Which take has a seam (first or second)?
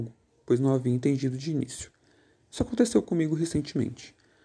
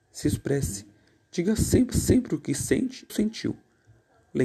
second